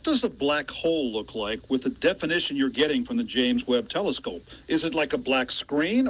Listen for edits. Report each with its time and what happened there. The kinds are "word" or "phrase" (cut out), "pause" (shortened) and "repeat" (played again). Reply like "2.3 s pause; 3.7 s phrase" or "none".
none